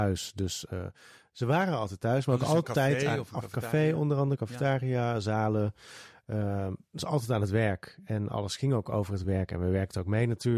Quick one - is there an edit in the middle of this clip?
no; 0 cuts

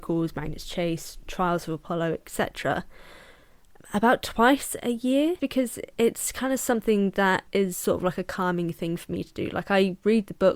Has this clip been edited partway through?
yes; 3 cuts; at 3.8 s, 5.4 s, 7.5 s

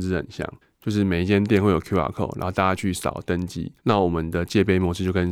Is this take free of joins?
no; 1 cut; at 3.8 s

